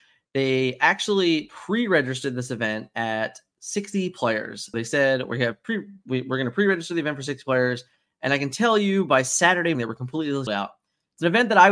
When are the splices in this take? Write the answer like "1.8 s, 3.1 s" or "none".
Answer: 4.7 s, 9.7 s, 10.5 s